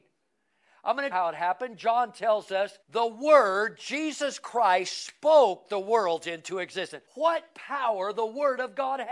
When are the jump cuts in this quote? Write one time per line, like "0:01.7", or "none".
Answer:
0:01.1
0:02.8
0:07.1